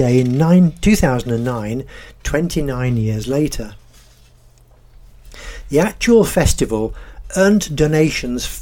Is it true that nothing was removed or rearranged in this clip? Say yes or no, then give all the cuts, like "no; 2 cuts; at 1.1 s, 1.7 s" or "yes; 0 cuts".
yes; 0 cuts